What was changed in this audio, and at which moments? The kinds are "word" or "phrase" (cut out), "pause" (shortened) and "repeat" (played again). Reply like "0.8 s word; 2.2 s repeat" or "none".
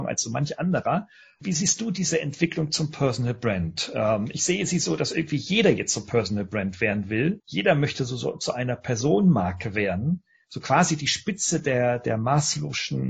none